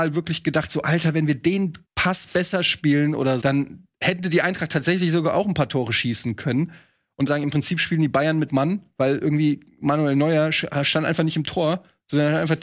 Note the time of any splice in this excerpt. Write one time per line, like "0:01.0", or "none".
0:01.9
0:03.4
0:07.3
0:08.5